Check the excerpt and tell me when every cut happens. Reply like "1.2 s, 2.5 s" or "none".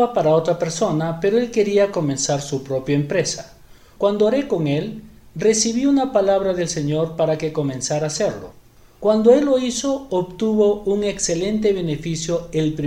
none